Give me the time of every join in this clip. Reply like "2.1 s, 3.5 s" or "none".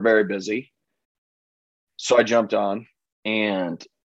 3.1 s